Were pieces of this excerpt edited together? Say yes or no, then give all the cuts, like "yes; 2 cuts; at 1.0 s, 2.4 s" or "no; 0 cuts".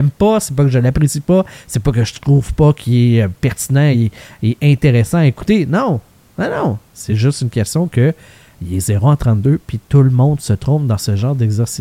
no; 0 cuts